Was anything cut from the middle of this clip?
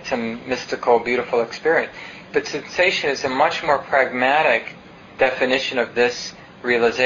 no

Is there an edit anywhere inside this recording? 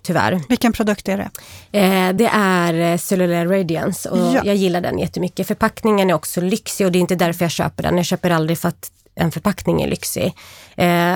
no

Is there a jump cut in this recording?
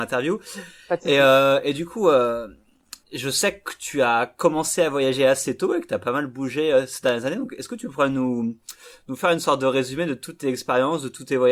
yes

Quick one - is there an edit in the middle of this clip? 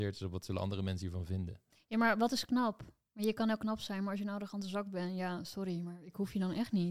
no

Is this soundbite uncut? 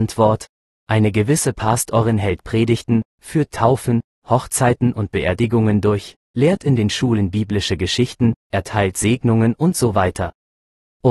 yes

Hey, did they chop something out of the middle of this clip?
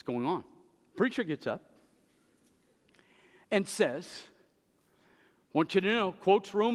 no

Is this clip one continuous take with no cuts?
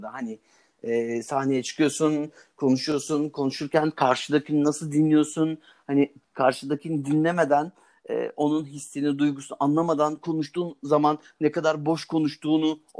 yes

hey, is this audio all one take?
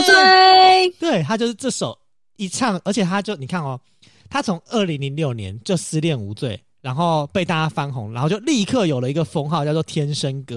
yes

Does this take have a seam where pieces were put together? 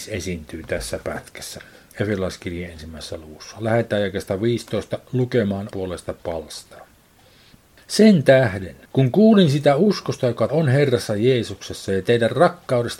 yes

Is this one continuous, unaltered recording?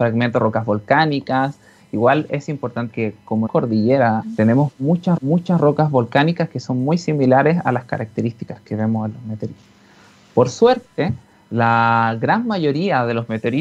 no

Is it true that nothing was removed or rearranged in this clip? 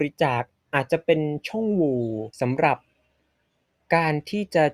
no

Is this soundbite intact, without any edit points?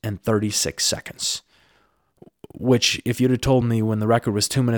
yes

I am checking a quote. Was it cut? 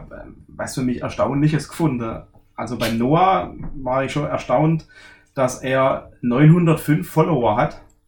no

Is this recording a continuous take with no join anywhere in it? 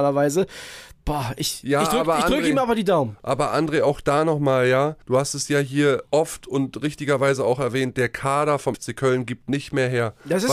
no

